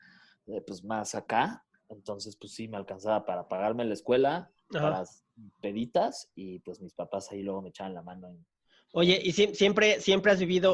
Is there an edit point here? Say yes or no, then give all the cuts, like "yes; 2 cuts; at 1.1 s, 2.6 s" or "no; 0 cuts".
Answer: no; 0 cuts